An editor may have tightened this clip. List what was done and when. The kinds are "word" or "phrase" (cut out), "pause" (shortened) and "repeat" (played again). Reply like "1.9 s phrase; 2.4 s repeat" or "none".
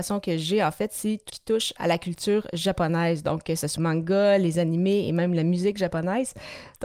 1.3 s word; 1.8 s word; 3.8 s word